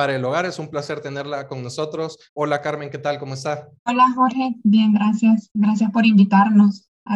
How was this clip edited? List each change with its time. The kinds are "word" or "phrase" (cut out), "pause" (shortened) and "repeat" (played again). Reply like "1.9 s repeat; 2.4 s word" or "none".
2.3 s pause; 3.8 s pause

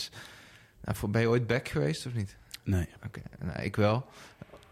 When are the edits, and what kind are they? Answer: 2.9 s pause

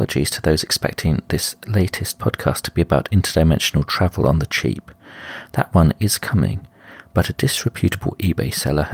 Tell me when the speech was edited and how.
none

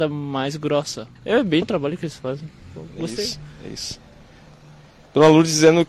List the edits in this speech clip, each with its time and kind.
1.2 s pause; 1.6 s word

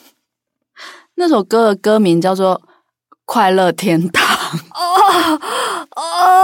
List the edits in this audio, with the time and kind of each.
none

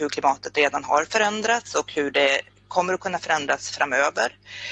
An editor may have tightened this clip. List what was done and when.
none

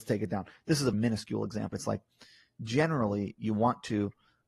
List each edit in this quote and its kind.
0.9 s word; 1.7 s word; 3.4 s word

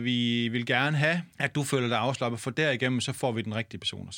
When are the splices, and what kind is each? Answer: 1.3 s pause

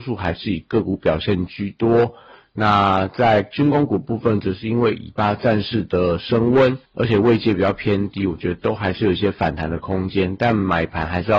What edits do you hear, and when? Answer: 6.8 s pause

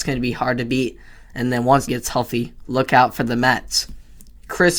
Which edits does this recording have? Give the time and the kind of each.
1.9 s word

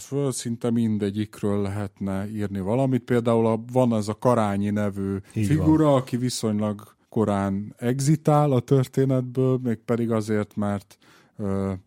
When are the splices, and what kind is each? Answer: 5.3 s pause; 7.0 s pause

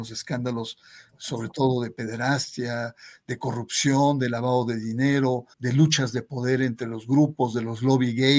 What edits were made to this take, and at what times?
5.5 s pause

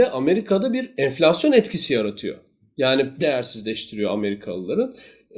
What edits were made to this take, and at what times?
3.2 s phrase

